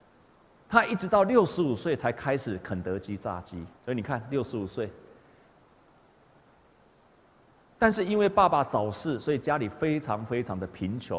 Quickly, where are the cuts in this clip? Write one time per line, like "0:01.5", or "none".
0:03.7